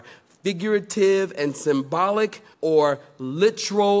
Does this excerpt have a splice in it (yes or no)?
yes